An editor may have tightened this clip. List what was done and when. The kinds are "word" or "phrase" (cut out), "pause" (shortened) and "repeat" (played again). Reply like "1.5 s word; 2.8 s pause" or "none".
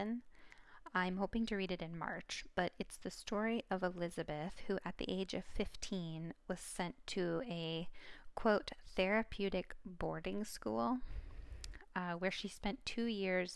none